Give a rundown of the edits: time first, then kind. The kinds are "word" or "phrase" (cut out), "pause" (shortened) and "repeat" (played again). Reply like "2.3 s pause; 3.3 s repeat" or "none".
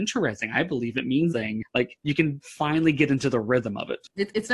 1.3 s word